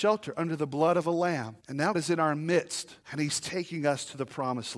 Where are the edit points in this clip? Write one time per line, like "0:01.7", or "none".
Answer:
0:01.6
0:01.9
0:03.0